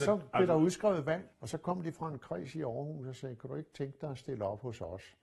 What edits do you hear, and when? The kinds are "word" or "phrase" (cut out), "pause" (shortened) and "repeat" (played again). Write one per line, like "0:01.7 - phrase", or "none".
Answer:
0:01.3 - pause